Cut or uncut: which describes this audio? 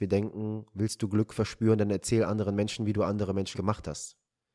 cut